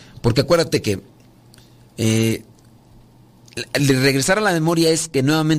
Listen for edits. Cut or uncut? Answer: uncut